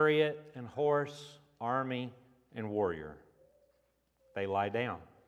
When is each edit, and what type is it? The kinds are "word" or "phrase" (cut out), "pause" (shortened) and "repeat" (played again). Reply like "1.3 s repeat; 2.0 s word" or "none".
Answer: none